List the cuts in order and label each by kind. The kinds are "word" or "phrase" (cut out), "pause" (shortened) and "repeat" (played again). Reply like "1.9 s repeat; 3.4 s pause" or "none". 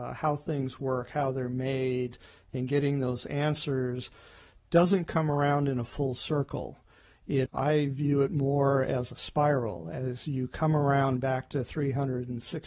7.5 s word